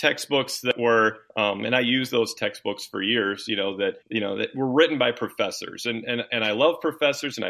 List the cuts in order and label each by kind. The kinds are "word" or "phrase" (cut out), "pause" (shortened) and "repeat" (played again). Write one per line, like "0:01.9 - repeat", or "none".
0:01.3 - pause
0:04.0 - pause